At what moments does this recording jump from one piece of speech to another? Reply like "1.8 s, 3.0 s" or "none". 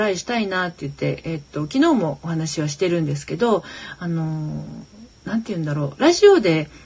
none

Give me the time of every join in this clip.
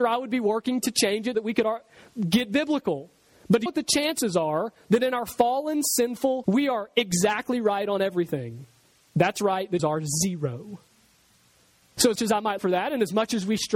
1.3 s, 3.7 s, 6.4 s, 9.8 s, 12.2 s, 12.6 s

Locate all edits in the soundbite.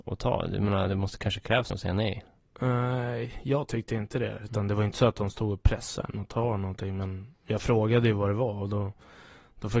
1.7 s

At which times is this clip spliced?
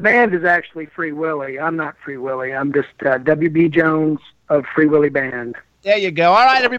none

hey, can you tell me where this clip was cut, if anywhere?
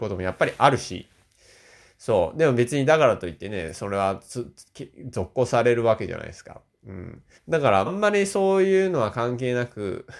7.3 s, 7.9 s

